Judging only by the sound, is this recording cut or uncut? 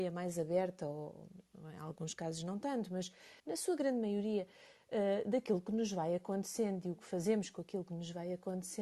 cut